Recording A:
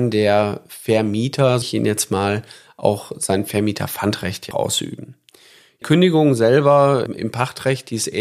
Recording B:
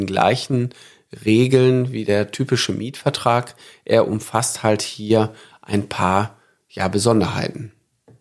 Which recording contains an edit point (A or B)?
A